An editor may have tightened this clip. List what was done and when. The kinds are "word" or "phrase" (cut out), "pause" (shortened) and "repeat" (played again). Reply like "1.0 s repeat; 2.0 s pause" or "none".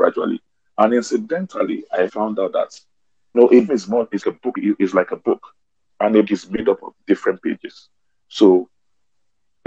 2.1 s word; 3.3 s word; 3.7 s word; 4.2 s word; 4.5 s word; 6.2 s word